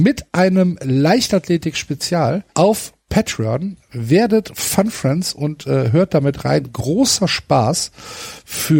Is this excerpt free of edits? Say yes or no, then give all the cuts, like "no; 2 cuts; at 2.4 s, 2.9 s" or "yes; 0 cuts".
no; 1 cut; at 2.5 s